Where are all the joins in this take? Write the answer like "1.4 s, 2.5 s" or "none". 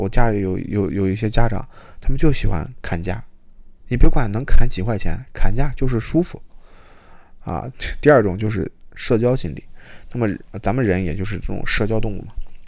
3.8 s